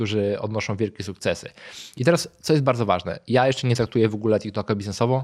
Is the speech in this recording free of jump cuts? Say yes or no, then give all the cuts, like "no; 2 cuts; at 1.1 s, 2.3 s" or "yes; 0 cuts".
yes; 0 cuts